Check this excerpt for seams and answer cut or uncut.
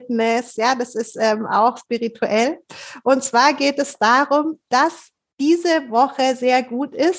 uncut